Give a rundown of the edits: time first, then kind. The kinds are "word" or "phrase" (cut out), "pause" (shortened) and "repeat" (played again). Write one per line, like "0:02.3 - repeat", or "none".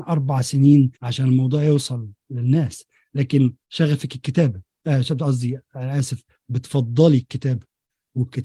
0:00.9 - pause
0:03.6 - pause